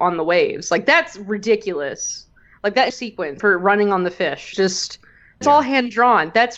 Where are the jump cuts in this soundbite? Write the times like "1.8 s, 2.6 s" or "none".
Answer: 2.9 s, 3.4 s, 4.5 s, 5.4 s